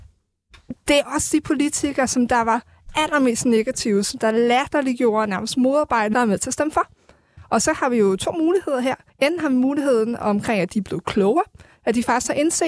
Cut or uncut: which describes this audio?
cut